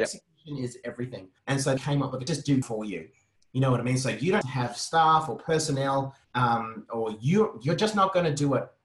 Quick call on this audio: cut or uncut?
cut